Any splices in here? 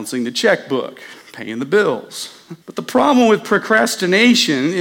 yes; 2 cuts; at 1.2 s, 2.6 s

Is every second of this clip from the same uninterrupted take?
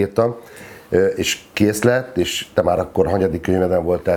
yes; 0 cuts

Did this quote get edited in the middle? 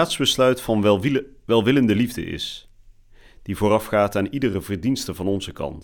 no; 0 cuts

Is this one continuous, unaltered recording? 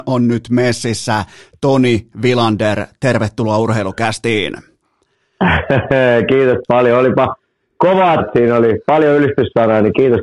no; 1 cut; at 8.2 s

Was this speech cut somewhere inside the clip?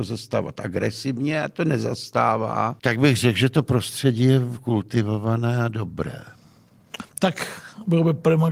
yes; 1 cut; at 2.8 s

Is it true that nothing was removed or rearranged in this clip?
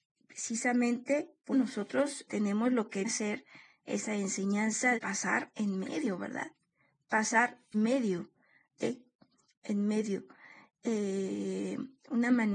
no; 5 cuts; at 1.5 s, 2.3 s, 3.0 s, 4.9 s, 7.7 s

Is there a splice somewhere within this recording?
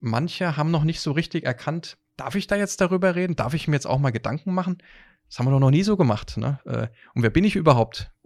no; 0 cuts

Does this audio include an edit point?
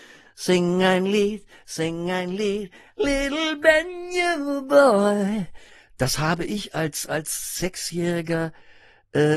no; 0 cuts

